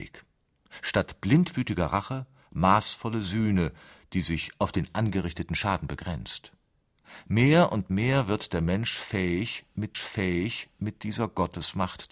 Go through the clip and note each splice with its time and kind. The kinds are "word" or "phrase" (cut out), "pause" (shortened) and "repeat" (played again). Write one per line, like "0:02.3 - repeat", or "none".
0:09.9 - repeat